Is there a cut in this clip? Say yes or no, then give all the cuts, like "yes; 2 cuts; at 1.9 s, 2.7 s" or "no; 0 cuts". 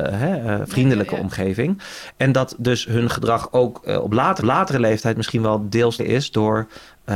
yes; 2 cuts; at 4.4 s, 6.0 s